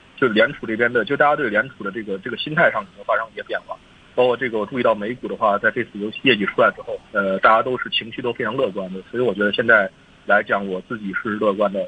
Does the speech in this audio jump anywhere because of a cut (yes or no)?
yes